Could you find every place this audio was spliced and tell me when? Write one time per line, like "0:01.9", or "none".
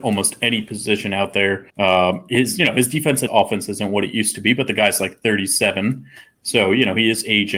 0:01.7
0:03.3